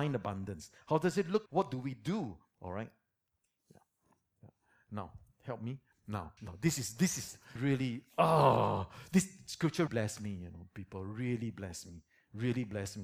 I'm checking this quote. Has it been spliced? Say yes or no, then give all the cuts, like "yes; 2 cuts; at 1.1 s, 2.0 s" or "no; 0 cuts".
yes; 4 cuts; at 1.5 s, 6.4 s, 7.6 s, 9.9 s